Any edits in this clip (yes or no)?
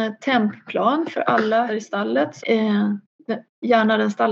yes